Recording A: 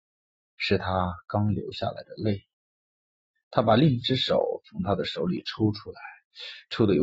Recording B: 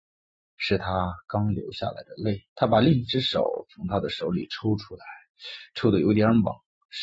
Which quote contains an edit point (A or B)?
B